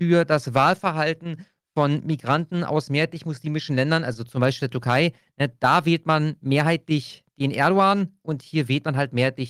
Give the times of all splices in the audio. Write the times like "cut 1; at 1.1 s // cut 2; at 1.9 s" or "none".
none